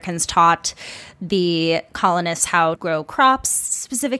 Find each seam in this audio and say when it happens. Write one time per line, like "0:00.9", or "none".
0:02.8